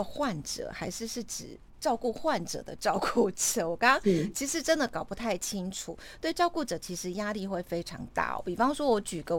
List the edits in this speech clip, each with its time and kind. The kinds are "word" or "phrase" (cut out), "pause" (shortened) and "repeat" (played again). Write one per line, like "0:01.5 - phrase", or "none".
none